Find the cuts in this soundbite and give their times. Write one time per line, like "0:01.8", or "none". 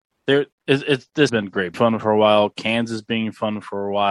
0:01.3
0:01.7

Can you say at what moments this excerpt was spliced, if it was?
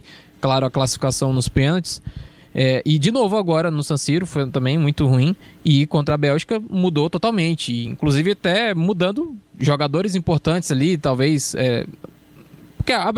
none

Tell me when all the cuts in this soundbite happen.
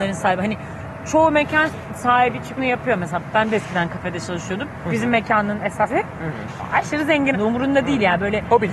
0:02.6
0:05.9
0:07.3

